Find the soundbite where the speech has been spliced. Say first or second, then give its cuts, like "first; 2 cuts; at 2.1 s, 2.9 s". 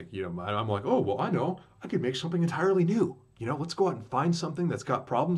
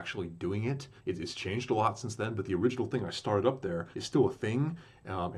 second; 2 cuts; at 1.0 s, 3.9 s